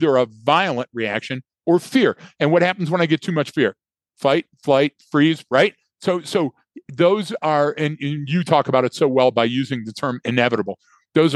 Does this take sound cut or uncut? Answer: uncut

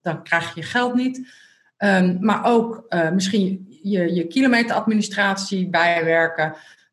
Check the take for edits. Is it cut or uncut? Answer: uncut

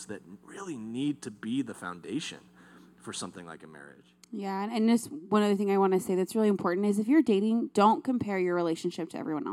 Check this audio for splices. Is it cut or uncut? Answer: uncut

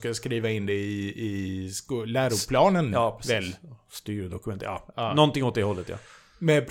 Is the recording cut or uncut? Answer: uncut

